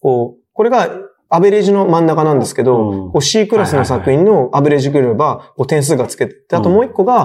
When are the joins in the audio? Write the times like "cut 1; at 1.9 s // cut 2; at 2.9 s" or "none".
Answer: none